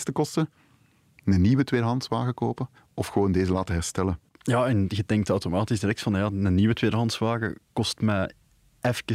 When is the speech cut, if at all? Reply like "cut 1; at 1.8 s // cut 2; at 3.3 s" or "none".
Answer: cut 1; at 2.8 s // cut 2; at 4.3 s